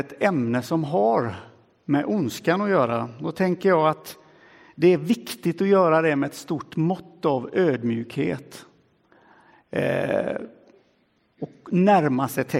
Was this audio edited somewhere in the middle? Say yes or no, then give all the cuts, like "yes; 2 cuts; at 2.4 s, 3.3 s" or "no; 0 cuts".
no; 0 cuts